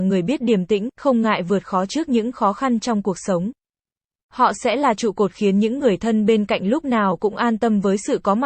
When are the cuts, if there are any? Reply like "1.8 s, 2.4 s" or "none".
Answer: none